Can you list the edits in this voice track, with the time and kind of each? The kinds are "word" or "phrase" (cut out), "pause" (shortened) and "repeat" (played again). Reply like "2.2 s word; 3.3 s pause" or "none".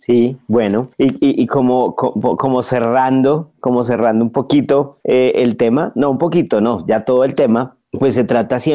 0.9 s pause; 5.0 s pause